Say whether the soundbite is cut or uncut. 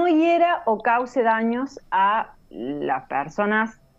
cut